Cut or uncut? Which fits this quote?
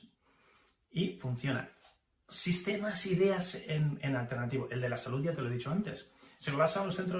uncut